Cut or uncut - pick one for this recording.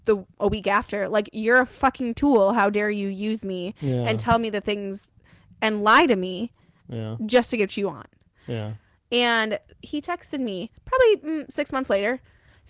uncut